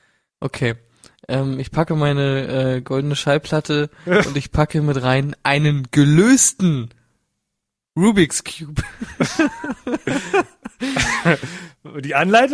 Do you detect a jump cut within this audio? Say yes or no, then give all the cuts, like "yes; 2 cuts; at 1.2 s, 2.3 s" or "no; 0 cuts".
no; 0 cuts